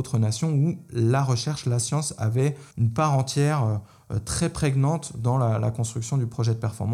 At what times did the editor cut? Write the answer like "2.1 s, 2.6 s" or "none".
2.7 s

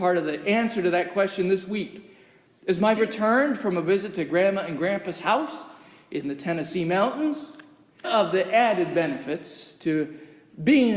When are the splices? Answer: 3.0 s, 8.0 s

